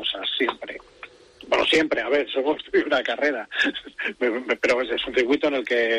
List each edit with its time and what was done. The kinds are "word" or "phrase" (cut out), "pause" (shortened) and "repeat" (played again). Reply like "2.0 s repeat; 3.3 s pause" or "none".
none